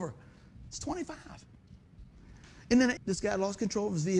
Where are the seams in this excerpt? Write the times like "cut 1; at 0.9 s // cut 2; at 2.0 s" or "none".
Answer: cut 1; at 3.0 s